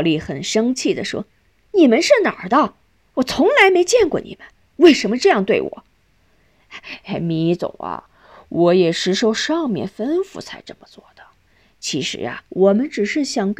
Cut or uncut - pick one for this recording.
cut